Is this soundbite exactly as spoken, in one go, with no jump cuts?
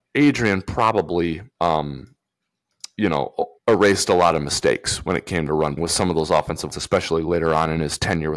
no; 4 cuts; at 1.5 s, 3.6 s, 5.8 s, 6.7 s

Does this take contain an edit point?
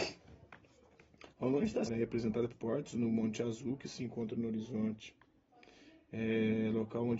yes; 2 cuts; at 1.9 s, 2.5 s

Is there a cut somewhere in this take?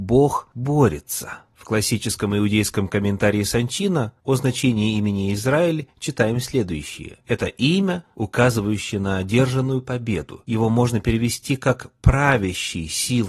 no; 0 cuts

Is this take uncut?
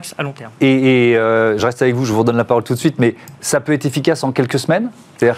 yes; 0 cuts

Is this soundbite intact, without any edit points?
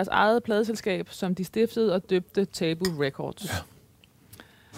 yes; 0 cuts

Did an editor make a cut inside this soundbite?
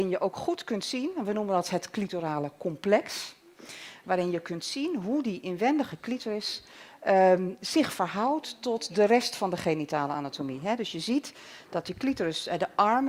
no; 0 cuts

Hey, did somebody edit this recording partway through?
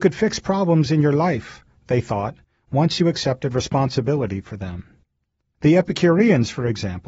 no; 0 cuts

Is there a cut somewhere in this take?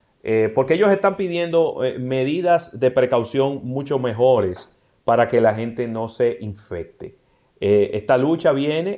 no; 0 cuts

